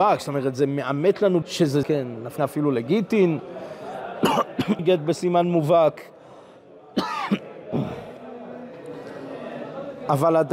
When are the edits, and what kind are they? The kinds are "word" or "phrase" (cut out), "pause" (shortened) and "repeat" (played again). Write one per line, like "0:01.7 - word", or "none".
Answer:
0:01.4 - word
0:01.8 - word
0:02.4 - word
0:04.8 - word